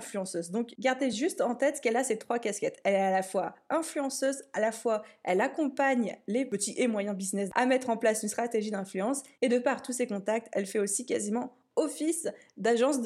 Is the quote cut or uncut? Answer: uncut